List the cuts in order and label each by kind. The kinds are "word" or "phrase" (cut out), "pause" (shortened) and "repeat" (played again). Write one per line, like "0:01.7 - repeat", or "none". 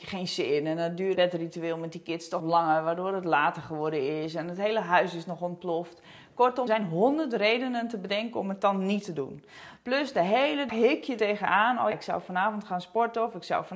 0:01.1 - word
0:02.4 - word
0:06.7 - word
0:10.7 - word
0:11.2 - word
0:11.9 - word